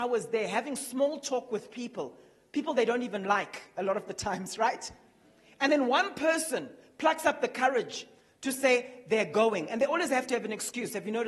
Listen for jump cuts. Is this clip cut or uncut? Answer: uncut